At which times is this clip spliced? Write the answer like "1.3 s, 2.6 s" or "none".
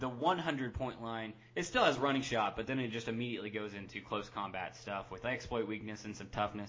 none